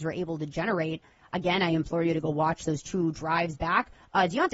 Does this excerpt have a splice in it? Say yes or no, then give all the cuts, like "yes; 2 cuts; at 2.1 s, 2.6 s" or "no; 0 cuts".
no; 0 cuts